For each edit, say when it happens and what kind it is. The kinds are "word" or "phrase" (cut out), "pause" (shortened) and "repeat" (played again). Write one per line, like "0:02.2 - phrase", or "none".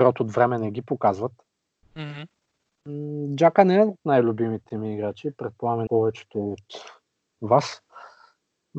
0:05.9 - word